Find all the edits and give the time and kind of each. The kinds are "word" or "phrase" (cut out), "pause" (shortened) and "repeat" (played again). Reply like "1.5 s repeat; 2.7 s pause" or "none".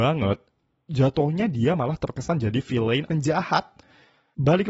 3.1 s word